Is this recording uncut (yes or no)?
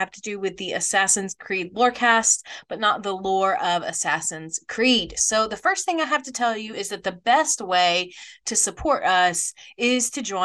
yes